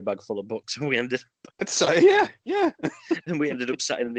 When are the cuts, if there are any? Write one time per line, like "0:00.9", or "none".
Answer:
0:01.5

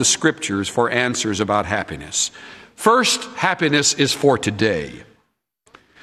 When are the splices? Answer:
none

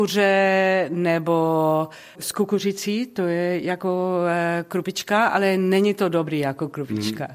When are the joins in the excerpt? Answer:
0:02.1

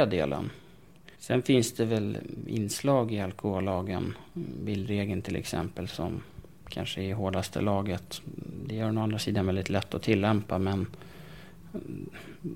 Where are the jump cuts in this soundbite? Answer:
0:01.1

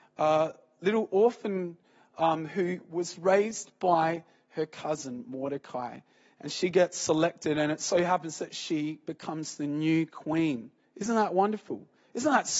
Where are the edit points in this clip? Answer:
none

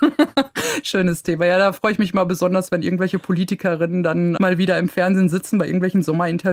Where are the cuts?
0:04.4

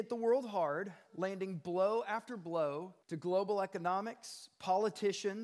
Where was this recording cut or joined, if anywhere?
0:03.0

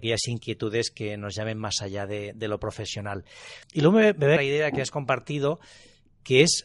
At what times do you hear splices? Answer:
0:03.6
0:04.4

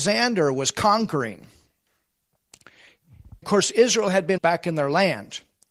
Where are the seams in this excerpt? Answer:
0:03.4
0:04.4

